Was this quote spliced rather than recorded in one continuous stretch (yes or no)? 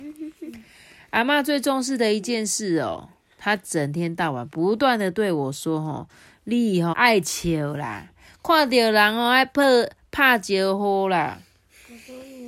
yes